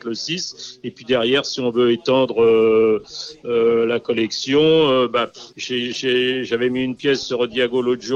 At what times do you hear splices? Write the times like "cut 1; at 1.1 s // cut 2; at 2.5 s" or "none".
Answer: cut 1; at 5.5 s